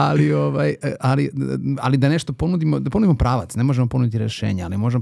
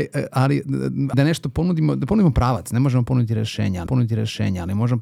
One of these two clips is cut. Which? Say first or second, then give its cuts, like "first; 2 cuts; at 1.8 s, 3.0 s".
second; 2 cuts; at 1.1 s, 3.9 s